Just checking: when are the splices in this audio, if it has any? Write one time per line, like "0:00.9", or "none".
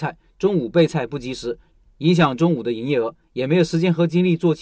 none